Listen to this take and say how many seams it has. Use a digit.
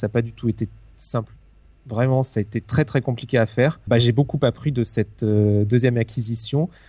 0